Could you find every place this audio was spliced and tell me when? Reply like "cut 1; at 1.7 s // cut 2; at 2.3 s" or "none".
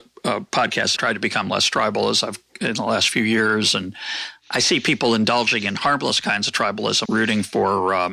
cut 1; at 1.0 s // cut 2; at 7.1 s